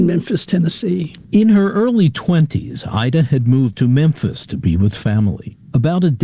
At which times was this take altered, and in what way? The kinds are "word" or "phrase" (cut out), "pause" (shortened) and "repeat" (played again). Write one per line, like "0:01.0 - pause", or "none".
0:03.7 - word